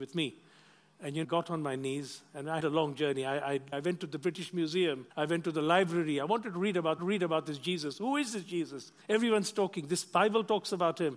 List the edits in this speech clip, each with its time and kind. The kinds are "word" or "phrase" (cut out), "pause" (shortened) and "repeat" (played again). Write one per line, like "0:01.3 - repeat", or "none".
0:01.2 - phrase
0:02.6 - word
0:03.7 - word
0:05.1 - pause
0:07.0 - repeat
0:09.0 - pause

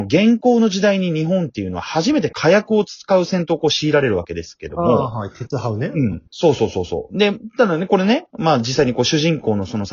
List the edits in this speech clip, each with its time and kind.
0:06.3 - pause

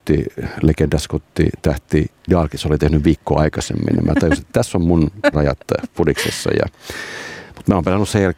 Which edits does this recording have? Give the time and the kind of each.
0:02.3 - word
0:05.3 - word

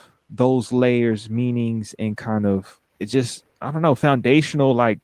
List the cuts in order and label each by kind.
0:02.9 - pause
0:03.5 - pause

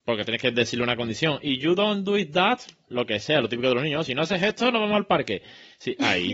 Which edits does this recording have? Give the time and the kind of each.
none

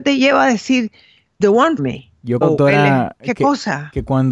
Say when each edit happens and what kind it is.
0:01.4 - word
0:01.8 - word
0:02.4 - word

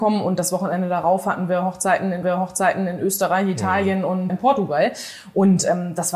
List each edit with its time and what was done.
0:02.2 - repeat
0:04.3 - word

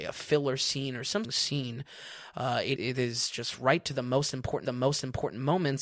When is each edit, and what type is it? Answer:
0:01.2 - phrase
0:02.8 - word
0:04.7 - repeat

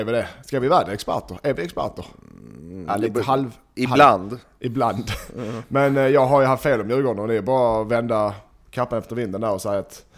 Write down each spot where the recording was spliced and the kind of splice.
none

